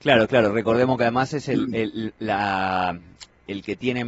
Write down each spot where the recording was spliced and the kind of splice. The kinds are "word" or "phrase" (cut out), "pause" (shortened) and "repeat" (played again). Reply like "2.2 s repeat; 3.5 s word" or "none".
none